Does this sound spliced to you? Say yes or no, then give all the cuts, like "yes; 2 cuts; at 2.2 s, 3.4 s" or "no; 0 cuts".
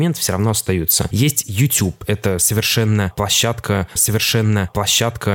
yes; 1 cut; at 4.0 s